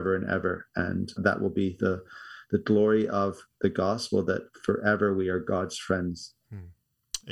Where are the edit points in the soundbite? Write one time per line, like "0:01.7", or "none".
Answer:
0:01.2

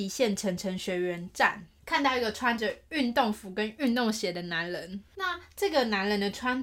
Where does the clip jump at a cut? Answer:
0:01.8
0:05.1

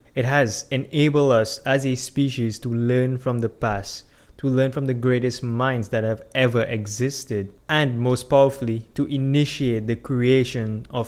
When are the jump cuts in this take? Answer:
none

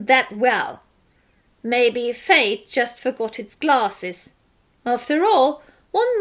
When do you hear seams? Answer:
none

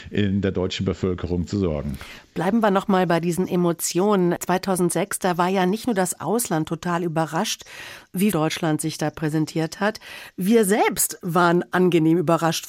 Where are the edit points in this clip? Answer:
0:08.3

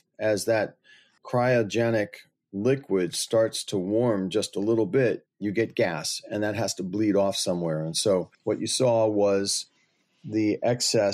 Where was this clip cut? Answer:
0:01.2
0:05.3
0:08.3

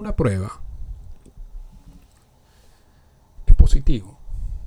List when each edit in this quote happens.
0:03.5

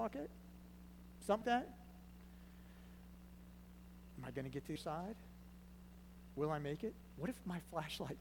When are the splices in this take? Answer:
0:01.4
0:04.8

